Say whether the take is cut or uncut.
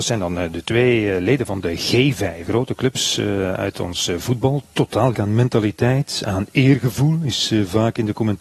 cut